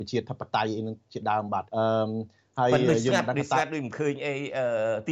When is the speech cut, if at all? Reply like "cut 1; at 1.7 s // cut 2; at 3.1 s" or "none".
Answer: cut 1; at 1.7 s